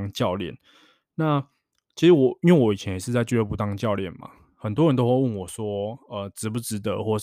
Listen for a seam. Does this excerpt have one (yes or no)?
no